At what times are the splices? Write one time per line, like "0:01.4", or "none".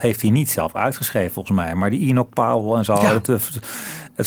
none